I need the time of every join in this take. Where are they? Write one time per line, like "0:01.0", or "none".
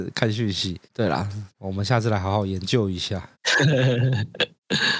0:01.5